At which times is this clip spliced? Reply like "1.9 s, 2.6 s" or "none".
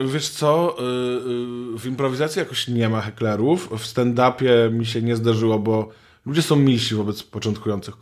none